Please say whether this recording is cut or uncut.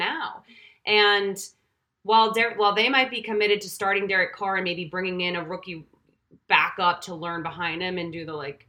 uncut